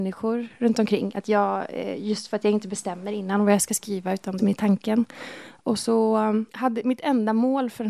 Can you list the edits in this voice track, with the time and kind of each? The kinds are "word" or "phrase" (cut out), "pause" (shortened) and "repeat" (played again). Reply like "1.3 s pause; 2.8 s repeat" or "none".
4.4 s phrase; 6.5 s pause

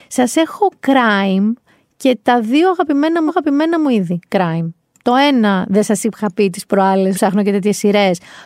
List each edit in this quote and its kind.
3.3 s repeat; 7.1 s word

